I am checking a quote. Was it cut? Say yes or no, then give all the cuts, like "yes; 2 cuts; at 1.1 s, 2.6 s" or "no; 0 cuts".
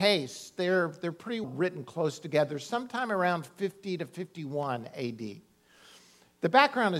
yes; 1 cut; at 1.4 s